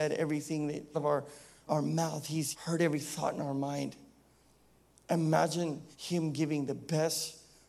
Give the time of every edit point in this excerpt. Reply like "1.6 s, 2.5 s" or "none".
0.9 s, 1.7 s, 2.5 s, 5.9 s